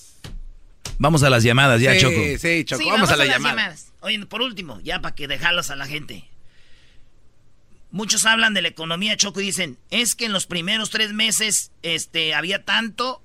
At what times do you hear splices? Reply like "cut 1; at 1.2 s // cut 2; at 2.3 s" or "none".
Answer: none